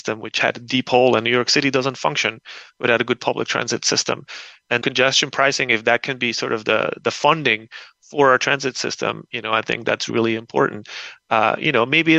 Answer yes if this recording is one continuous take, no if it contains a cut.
no